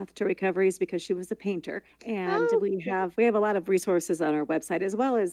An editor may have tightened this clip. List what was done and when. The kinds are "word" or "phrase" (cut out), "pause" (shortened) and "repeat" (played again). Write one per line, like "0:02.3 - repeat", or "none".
0:01.9 - pause
0:03.1 - word